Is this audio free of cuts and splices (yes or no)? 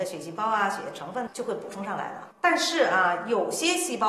no